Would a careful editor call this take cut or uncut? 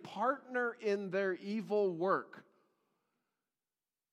uncut